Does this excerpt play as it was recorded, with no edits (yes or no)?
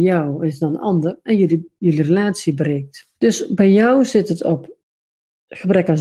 no